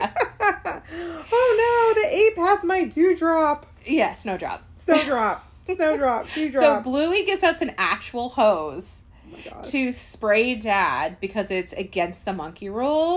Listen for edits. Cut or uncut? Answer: uncut